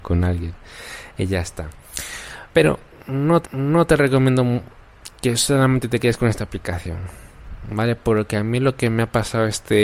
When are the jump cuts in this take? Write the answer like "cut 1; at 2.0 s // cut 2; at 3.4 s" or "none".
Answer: cut 1; at 2.5 s // cut 2; at 3.4 s